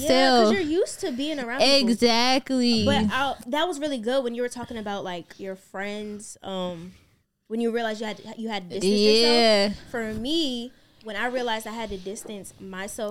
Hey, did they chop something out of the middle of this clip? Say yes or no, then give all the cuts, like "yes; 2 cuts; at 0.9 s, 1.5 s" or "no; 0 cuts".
no; 0 cuts